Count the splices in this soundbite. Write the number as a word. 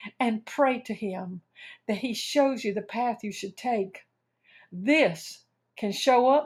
zero